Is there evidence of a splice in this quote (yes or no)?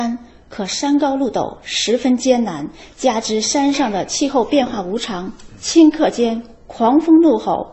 no